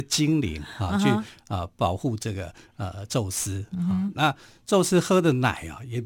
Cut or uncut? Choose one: uncut